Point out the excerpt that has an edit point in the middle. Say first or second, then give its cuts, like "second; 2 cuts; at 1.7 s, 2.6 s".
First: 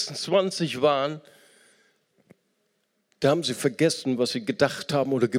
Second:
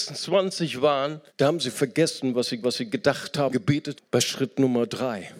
second; 4 cuts; at 1.3 s, 2.6 s, 3.5 s, 4.0 s